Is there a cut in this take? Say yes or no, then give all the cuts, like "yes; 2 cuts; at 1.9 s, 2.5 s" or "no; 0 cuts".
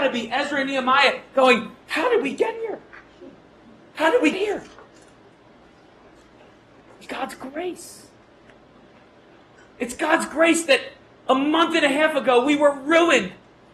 yes; 2 cuts; at 4.3 s, 7.1 s